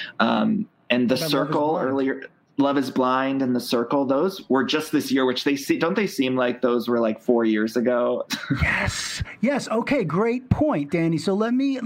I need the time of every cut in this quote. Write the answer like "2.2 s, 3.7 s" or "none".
2.4 s